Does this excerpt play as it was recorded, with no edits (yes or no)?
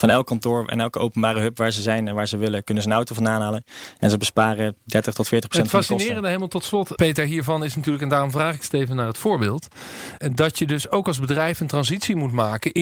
no